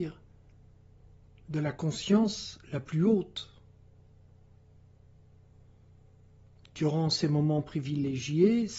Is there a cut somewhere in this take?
no; 0 cuts

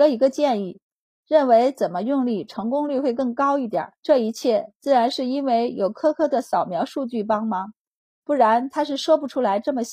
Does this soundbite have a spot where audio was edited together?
yes; 1 cut; at 4.0 s

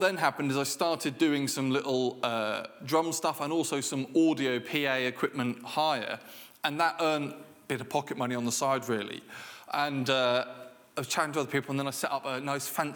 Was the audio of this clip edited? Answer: no; 0 cuts

